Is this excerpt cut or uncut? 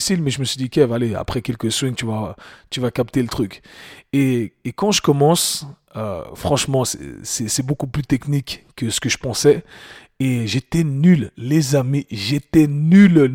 uncut